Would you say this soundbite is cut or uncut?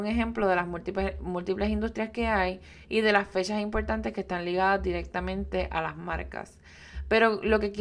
uncut